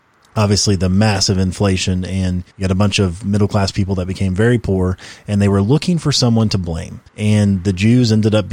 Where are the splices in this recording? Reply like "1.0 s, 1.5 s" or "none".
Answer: 2.5 s, 7.1 s